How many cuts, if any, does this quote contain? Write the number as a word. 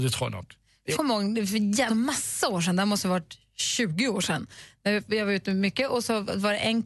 two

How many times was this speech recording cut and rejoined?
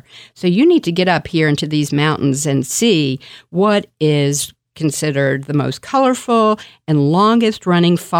zero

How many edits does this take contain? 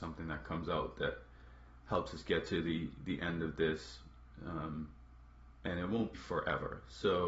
one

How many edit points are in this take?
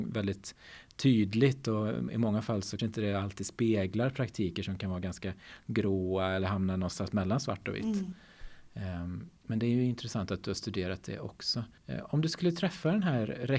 three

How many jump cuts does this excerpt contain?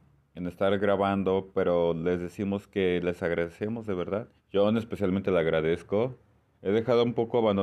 one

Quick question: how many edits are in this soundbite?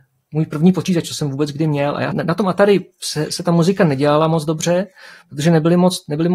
one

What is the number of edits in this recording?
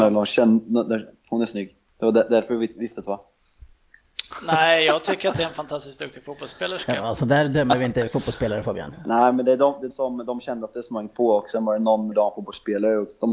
three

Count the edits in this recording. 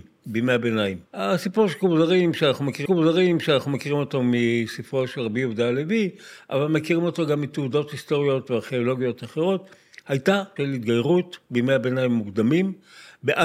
three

